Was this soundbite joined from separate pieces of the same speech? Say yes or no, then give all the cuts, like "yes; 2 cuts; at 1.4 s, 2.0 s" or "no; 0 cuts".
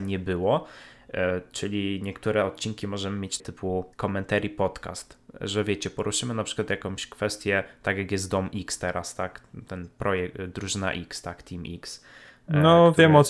yes; 2 cuts; at 3.4 s, 3.9 s